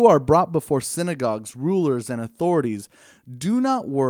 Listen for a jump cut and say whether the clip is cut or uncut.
uncut